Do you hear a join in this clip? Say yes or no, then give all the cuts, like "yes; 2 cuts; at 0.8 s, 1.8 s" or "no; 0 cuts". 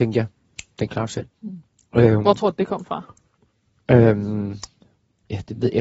no; 0 cuts